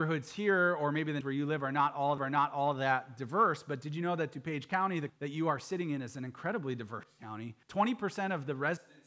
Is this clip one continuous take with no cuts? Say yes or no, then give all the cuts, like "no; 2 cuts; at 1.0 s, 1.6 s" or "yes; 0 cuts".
no; 4 cuts; at 1.2 s, 2.2 s, 5.1 s, 7.6 s